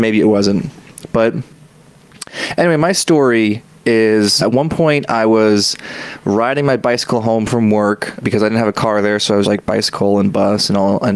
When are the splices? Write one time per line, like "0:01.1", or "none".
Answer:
0:04.4
0:08.2
0:09.4